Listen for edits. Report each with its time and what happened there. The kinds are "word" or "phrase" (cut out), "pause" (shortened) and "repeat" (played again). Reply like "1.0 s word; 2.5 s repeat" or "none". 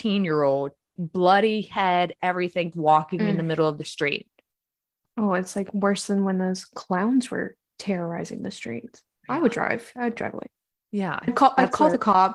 1.0 s word; 2.7 s word; 10.2 s word